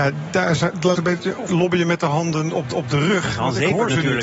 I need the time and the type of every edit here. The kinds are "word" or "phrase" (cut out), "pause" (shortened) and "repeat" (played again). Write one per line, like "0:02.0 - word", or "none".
0:00.9 - word
0:01.5 - word
0:02.7 - repeat